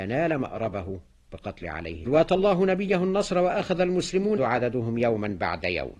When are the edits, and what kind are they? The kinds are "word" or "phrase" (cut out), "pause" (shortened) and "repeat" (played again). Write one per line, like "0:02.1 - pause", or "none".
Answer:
0:01.6 - word
0:02.1 - phrase
0:04.4 - word